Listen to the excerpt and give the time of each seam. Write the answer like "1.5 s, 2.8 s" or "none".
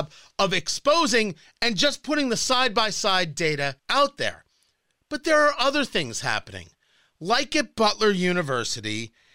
3.8 s